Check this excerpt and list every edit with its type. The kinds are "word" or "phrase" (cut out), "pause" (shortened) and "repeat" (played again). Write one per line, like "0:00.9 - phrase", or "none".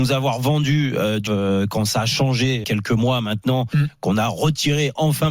0:01.3 - word
0:02.6 - phrase

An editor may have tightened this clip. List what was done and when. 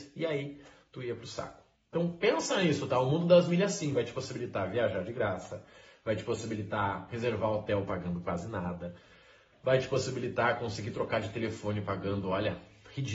none

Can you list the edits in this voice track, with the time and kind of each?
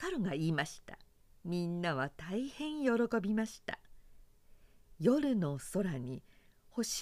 0:01.2 - pause

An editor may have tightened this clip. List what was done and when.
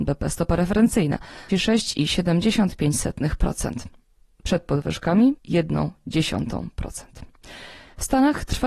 0:01.5 - word
0:05.4 - word

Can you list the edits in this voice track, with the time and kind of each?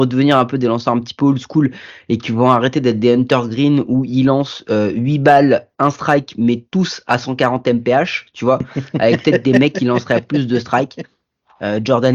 none

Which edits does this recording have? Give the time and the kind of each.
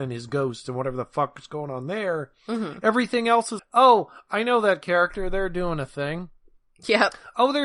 0:03.6 - word

